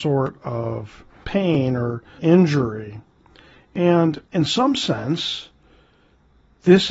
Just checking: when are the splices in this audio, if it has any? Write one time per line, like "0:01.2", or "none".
0:01.2
0:02.2
0:04.3